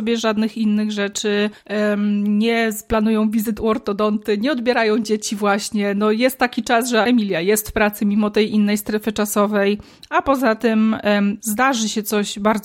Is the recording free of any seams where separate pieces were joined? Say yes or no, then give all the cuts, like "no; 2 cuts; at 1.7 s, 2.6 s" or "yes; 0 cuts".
no; 2 cuts; at 7.0 s, 11.4 s